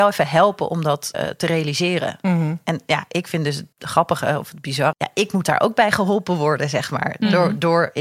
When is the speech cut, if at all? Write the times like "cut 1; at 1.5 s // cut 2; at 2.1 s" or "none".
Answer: cut 1; at 1.1 s // cut 2; at 3.7 s // cut 3; at 4.9 s